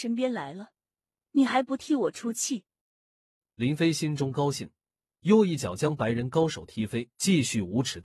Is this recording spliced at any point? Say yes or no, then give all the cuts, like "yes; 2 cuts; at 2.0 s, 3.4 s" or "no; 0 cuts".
yes; 1 cut; at 7.1 s